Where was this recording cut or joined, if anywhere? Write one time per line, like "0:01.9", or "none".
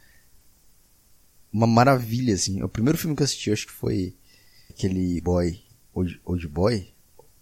0:04.7
0:05.2